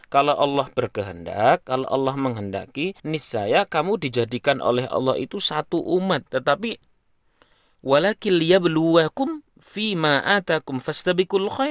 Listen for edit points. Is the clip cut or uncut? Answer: cut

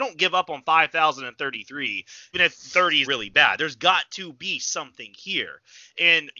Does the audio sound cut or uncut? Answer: cut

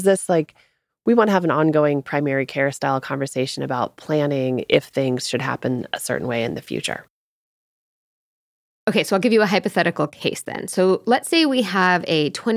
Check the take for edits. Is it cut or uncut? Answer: uncut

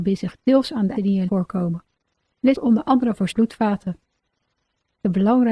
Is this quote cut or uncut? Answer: cut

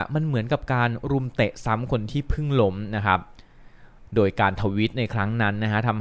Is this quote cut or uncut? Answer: uncut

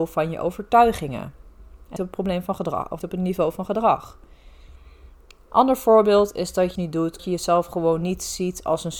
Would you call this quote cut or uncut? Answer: cut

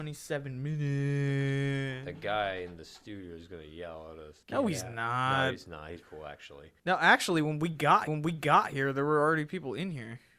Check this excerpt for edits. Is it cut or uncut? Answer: cut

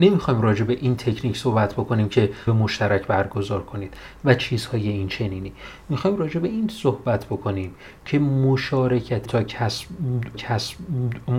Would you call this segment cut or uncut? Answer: cut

